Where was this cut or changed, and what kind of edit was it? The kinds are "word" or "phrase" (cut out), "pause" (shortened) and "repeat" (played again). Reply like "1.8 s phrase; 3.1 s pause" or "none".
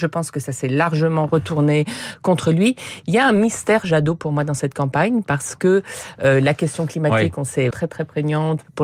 7.7 s word